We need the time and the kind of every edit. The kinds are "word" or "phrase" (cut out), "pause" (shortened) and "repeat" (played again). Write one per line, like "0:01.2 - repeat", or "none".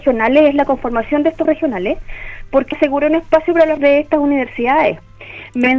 0:01.5 - word
0:02.7 - word
0:03.8 - word